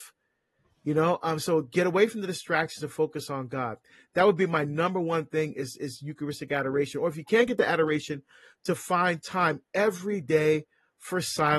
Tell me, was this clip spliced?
no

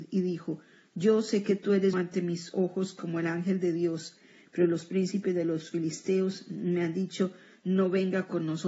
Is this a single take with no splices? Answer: no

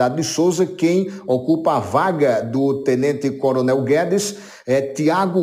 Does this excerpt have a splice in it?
no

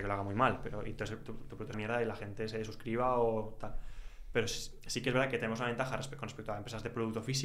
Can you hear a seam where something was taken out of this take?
yes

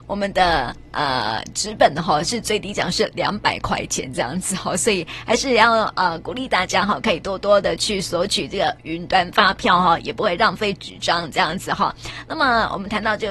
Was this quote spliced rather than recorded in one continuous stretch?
no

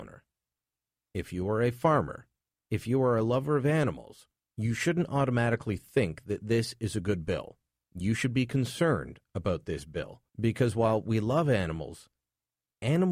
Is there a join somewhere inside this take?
yes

